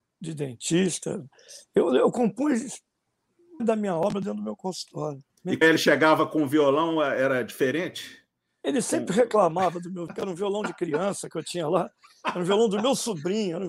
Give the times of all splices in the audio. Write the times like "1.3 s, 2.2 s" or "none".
3.6 s, 5.3 s, 5.6 s, 10.1 s